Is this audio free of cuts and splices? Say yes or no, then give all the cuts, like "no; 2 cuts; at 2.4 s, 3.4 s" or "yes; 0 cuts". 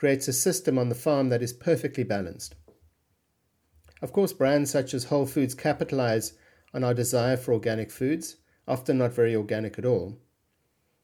yes; 0 cuts